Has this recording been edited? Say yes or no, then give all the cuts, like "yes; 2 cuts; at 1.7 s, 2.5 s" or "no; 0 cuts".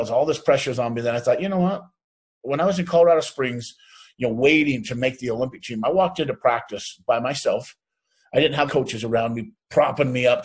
yes; 1 cut; at 8.7 s